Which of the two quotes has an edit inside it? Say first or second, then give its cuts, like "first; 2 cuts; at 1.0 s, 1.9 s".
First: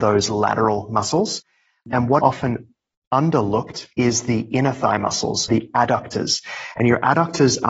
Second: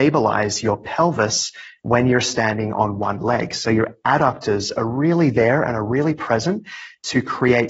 first; 3 cuts; at 2.2 s, 3.9 s, 5.5 s